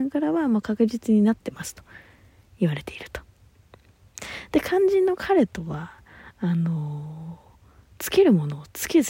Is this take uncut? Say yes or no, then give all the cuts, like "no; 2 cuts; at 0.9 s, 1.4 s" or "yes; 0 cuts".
yes; 0 cuts